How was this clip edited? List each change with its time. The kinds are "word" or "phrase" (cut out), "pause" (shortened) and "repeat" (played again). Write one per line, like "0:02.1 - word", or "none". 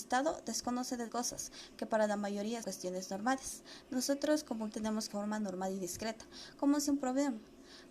0:01.1 - word
0:02.6 - word
0:04.7 - word
0:05.1 - phrase
0:06.9 - phrase

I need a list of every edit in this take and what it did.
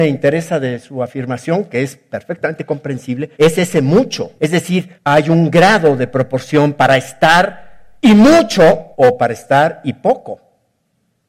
0:03.3 - pause
0:04.4 - pause
0:05.0 - pause
0:08.0 - pause
0:08.9 - pause

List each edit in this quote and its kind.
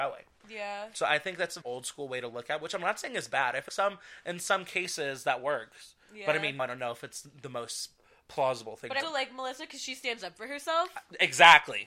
0:01.6 - word
0:03.7 - word
0:06.6 - word
0:09.0 - word

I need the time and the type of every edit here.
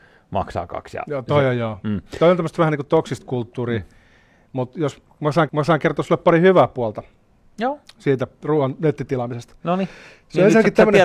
0:05.5 - repeat

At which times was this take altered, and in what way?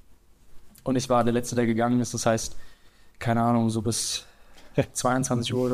none

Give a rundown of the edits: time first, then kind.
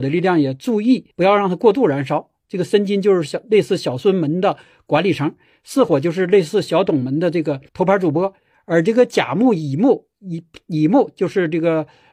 0:01.1 - pause
0:07.7 - pause

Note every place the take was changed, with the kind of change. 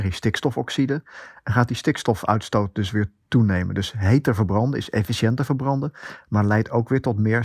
none

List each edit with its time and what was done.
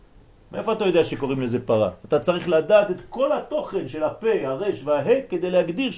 none

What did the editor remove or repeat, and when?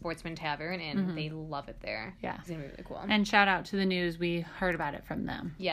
0:02.5 - word

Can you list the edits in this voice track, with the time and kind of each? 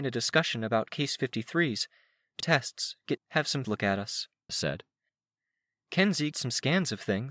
0:02.4 - word
0:03.2 - word
0:03.6 - word
0:04.5 - word
0:06.3 - word

